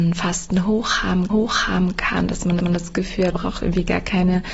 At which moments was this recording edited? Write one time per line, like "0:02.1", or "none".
0:01.3
0:02.6
0:03.3